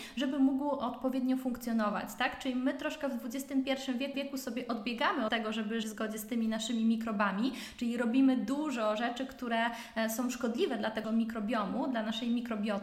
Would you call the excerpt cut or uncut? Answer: cut